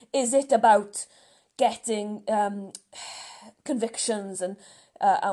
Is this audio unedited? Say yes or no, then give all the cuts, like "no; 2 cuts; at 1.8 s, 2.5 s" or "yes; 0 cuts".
yes; 0 cuts